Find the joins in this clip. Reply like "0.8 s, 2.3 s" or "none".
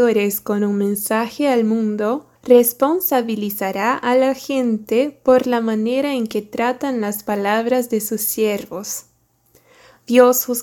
2.4 s

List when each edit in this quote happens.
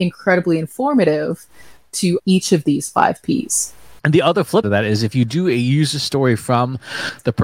2.2 s, 4.0 s, 4.6 s

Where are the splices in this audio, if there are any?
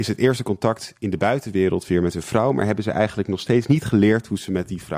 none

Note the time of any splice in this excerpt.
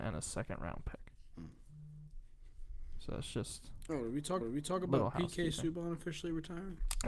4.4 s

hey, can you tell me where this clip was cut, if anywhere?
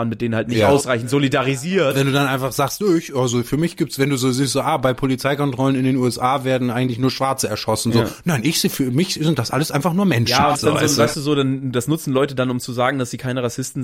10.6 s

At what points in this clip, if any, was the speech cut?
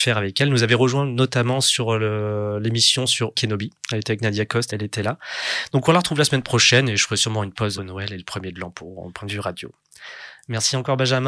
3.3 s, 4.7 s, 7.8 s

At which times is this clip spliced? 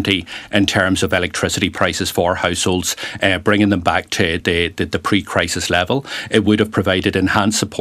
none

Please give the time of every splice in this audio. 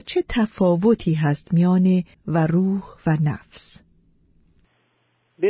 2.1 s

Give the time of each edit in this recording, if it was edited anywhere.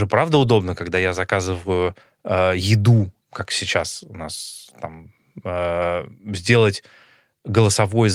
2.0 s, 3.2 s

